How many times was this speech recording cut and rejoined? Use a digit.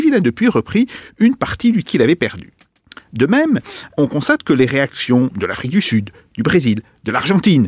2